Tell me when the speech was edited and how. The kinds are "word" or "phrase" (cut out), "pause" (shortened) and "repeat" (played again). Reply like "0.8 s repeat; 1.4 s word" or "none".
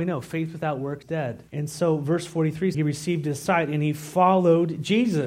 1.0 s word; 1.5 s pause; 2.7 s phrase